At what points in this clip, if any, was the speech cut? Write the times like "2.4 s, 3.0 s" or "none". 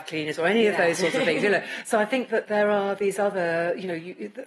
none